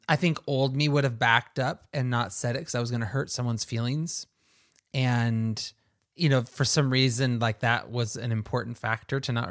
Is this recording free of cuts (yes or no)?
no